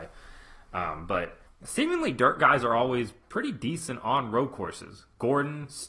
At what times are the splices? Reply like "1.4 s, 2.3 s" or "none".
1.5 s

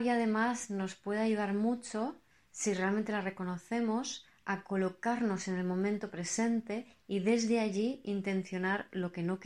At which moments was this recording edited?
none

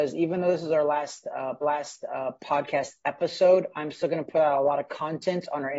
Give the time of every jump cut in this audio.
1.6 s

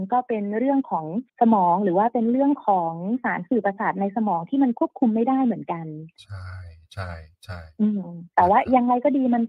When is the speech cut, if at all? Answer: 1.3 s

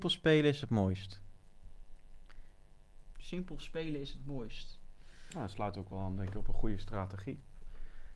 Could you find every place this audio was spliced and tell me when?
none

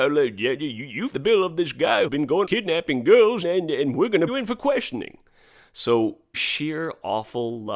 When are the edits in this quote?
1.1 s, 2.1 s, 2.4 s, 3.4 s, 4.3 s, 6.3 s

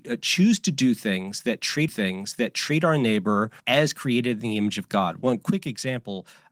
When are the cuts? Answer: 1.9 s, 3.6 s

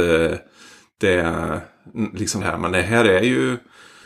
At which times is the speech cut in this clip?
2.4 s

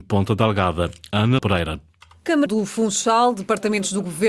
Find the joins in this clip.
1.4 s, 2.5 s

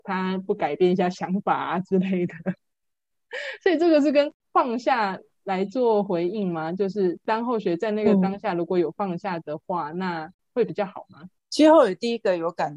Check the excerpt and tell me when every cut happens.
11.4 s

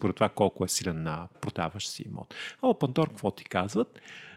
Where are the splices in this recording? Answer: 1.3 s

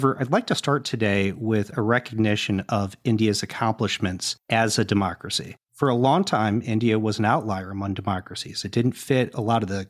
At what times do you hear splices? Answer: 5.6 s

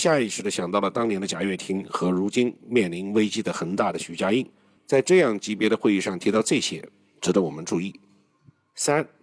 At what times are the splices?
none

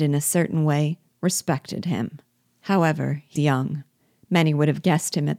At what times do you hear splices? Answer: 2.4 s, 3.4 s

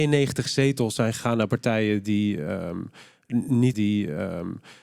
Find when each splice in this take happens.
3.7 s

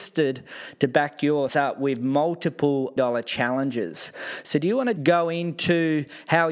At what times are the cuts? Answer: 1.5 s, 3.0 s, 5.0 s

